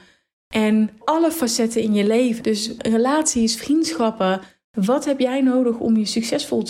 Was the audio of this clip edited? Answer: yes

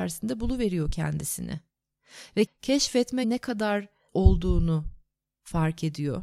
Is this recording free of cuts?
no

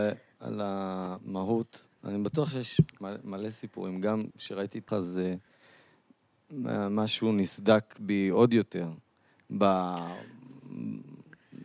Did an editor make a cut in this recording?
yes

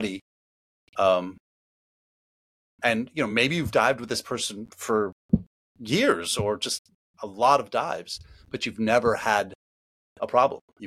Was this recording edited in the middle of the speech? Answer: no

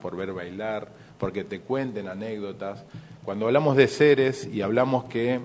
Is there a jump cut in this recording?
no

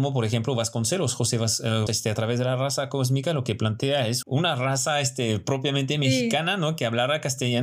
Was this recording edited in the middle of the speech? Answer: yes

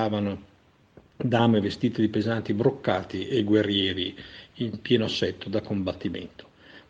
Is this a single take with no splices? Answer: yes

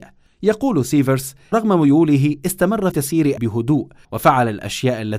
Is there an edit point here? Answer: yes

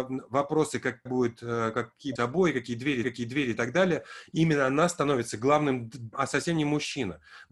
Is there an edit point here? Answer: yes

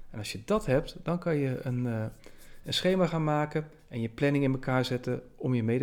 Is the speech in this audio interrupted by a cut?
no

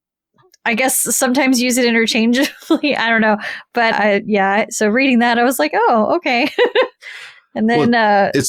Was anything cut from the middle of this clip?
yes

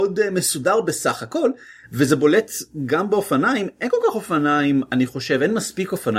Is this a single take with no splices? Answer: yes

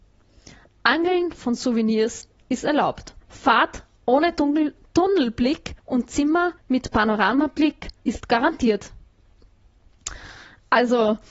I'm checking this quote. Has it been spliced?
yes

